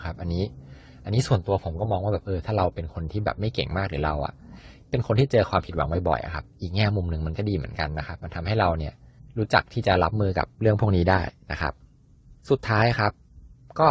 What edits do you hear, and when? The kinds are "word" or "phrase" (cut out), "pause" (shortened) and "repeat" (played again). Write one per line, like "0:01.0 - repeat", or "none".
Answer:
0:09.2 - pause
0:12.4 - pause